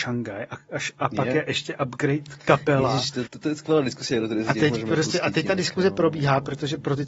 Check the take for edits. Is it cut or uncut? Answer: cut